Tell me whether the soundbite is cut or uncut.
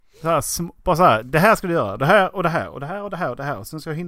uncut